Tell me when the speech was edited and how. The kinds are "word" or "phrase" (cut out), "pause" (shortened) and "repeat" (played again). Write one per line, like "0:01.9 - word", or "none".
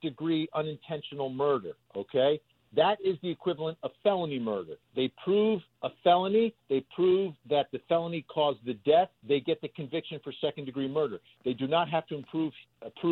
0:04.8 - pause
0:09.2 - pause